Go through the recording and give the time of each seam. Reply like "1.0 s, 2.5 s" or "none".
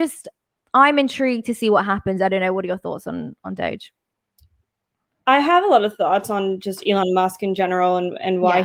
none

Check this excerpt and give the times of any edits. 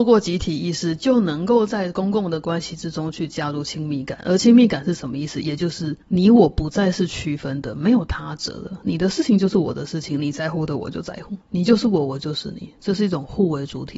6.0 s, 11.4 s

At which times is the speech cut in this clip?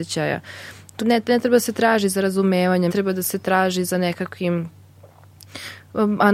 1.0 s, 2.9 s

